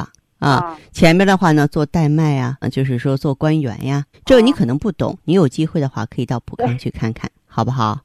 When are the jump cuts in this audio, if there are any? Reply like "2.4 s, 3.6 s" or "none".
2.6 s, 4.1 s